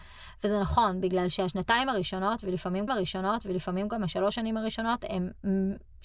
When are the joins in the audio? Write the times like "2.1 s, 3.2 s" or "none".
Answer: 2.9 s